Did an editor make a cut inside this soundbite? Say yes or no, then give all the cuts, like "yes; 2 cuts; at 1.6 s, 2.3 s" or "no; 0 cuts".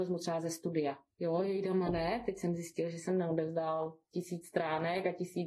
no; 0 cuts